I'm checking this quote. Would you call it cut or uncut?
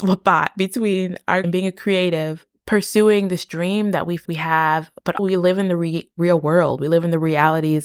cut